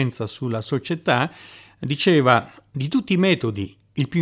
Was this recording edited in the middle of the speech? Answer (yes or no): no